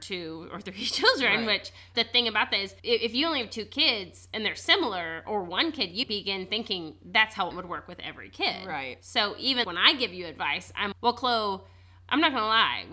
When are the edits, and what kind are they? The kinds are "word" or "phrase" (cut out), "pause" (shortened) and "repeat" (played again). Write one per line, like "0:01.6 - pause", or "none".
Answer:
0:01.9 - word
0:02.8 - pause
0:06.0 - word
0:07.5 - phrase
0:09.6 - word
0:10.9 - word